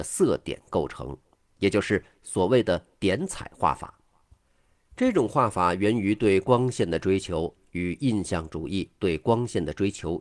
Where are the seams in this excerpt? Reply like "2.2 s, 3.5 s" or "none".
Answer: 2.9 s

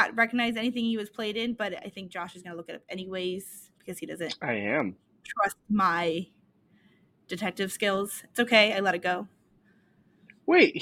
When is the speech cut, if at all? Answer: none

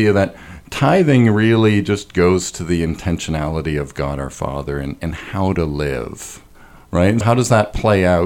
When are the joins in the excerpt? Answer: 7.2 s

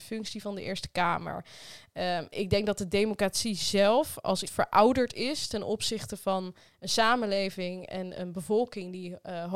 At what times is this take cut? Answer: 4.4 s

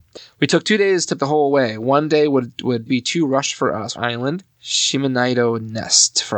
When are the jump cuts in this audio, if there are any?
1.2 s, 2.9 s, 3.9 s, 4.5 s

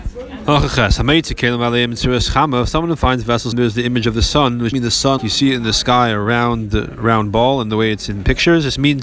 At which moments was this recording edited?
3.5 s, 4.7 s, 5.2 s

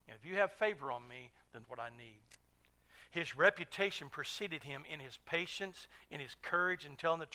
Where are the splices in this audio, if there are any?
1.6 s

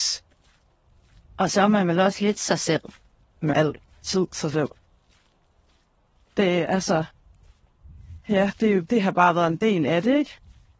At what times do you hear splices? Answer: 3.5 s, 8.9 s

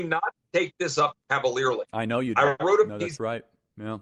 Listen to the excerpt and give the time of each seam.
none

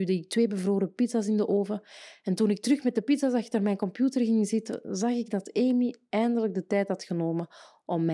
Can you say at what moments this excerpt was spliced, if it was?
none

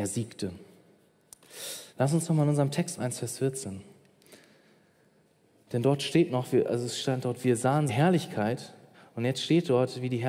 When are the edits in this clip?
1.9 s, 3.0 s, 7.9 s, 8.9 s

